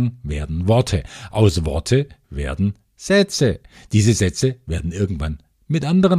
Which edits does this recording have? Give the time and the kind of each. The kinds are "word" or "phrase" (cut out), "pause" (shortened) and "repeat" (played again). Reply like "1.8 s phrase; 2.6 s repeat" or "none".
none